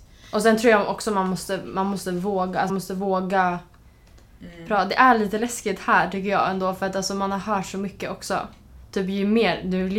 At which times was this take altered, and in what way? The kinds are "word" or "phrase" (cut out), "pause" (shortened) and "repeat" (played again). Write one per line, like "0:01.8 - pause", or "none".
0:02.7 - word